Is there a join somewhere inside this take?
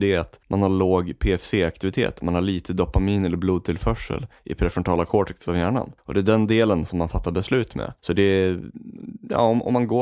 yes; 1 cut; at 8.0 s

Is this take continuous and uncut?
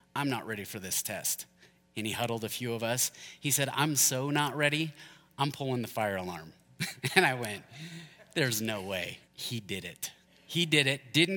no; 1 cut; at 9.2 s

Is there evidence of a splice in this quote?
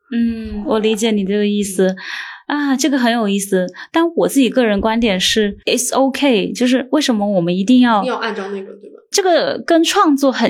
yes; 1 cut; at 5.6 s

